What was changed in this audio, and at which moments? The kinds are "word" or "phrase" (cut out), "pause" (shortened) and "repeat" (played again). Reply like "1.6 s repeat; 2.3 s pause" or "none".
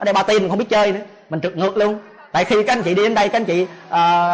none

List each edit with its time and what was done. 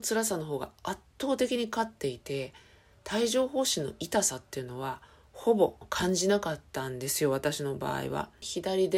none

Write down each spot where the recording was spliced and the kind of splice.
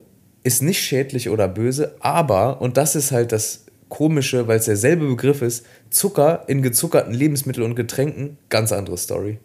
8.4 s pause

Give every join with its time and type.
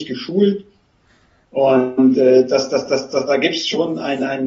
none

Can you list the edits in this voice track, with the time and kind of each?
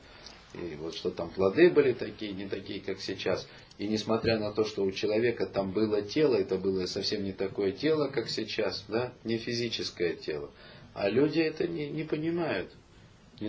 none

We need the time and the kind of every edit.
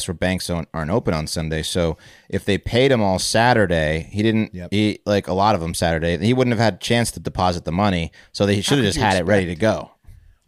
none

